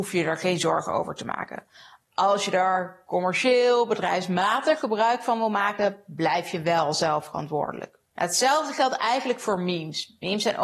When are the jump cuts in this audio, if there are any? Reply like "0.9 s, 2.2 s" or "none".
none